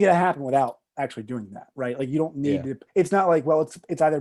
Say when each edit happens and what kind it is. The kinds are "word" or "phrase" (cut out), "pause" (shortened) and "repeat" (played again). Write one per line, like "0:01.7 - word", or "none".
0:02.9 - pause